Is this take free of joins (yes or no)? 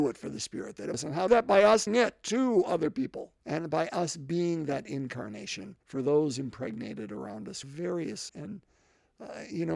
no